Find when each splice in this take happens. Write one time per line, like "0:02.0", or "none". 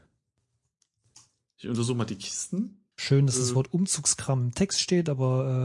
0:02.9